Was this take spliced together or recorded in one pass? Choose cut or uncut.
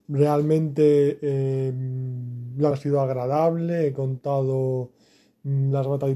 cut